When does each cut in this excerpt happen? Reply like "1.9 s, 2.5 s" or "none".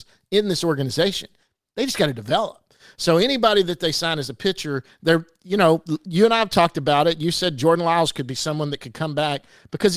none